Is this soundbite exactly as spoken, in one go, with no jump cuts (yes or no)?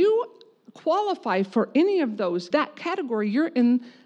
no